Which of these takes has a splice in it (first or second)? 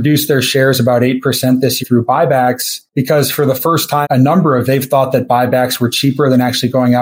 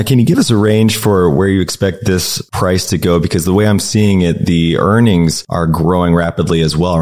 first